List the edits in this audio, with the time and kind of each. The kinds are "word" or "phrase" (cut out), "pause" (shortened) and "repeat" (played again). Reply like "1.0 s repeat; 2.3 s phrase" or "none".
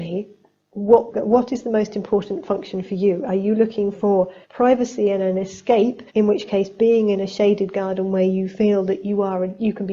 4.4 s pause; 6.1 s pause